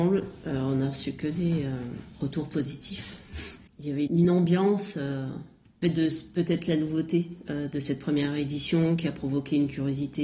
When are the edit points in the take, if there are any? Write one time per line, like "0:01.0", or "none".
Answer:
0:03.7
0:04.1
0:05.8